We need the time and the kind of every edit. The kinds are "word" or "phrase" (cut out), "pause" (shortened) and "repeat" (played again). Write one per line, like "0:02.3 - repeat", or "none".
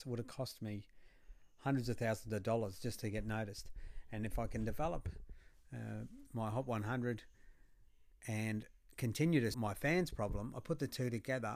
0:09.5 - word